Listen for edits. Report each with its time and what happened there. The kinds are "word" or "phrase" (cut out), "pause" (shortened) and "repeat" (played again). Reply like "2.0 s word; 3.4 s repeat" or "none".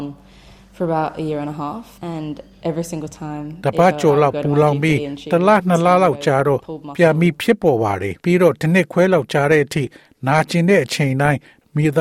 2.0 s pause; 8.2 s pause